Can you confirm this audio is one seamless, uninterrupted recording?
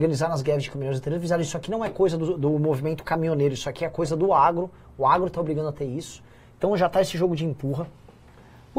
yes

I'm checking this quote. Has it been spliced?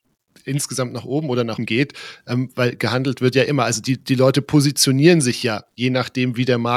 yes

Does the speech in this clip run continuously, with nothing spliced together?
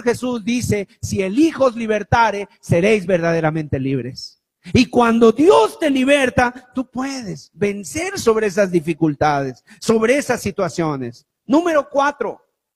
yes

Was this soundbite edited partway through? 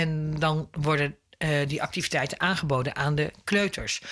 no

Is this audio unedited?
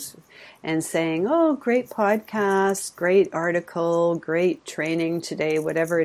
yes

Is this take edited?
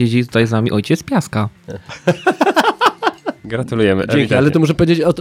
no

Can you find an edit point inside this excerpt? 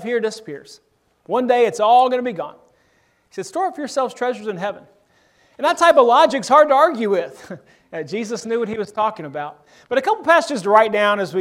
no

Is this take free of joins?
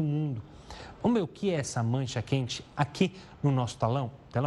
yes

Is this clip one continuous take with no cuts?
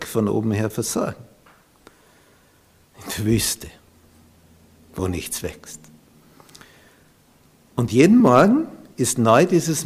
yes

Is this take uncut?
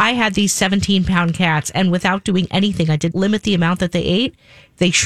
no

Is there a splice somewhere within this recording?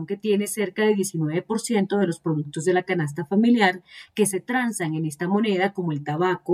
no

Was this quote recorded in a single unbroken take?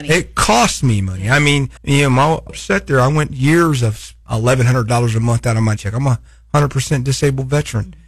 no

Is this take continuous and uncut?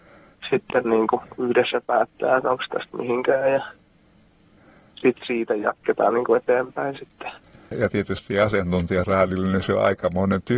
yes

